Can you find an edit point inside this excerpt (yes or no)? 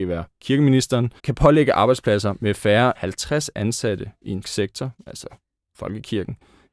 yes